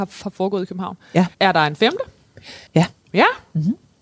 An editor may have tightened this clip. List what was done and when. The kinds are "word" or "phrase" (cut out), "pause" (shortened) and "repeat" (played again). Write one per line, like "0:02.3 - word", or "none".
0:01.3 - pause
0:02.7 - pause